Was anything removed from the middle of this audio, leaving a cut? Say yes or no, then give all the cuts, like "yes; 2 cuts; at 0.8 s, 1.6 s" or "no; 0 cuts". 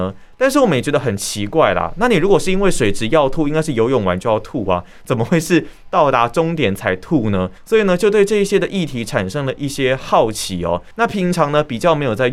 yes; 2 cuts; at 7.6 s, 10.9 s